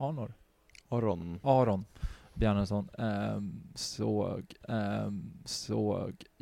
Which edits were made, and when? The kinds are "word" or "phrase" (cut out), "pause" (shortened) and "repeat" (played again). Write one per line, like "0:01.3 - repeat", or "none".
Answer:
0:04.6 - repeat